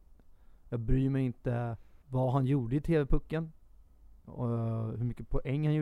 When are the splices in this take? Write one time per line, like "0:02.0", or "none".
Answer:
0:02.0
0:04.2